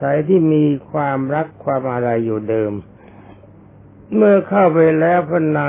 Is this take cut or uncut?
uncut